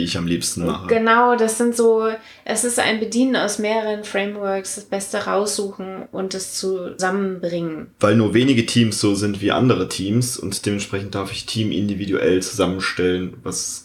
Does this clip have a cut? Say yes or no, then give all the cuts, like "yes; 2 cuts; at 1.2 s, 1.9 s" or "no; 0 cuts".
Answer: no; 0 cuts